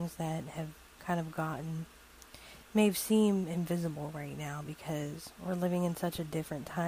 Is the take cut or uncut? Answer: uncut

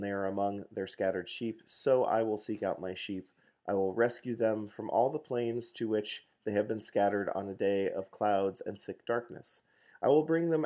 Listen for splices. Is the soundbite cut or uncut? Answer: uncut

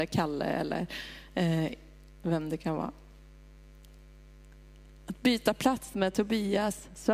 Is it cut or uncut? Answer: uncut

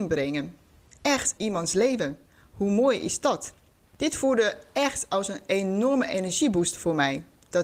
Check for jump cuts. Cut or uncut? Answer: cut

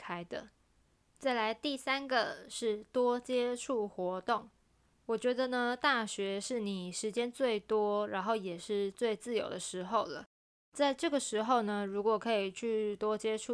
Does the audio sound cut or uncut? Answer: uncut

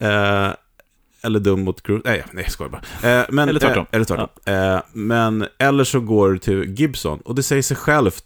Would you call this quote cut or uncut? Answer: uncut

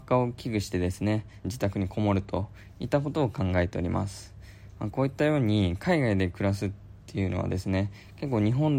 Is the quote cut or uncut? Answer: cut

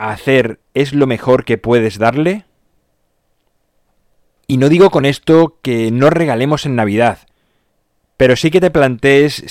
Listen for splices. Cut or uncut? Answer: uncut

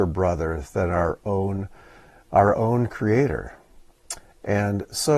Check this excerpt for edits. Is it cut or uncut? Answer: uncut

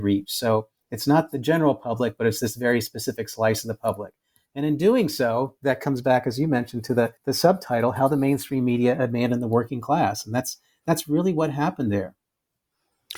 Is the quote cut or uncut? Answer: cut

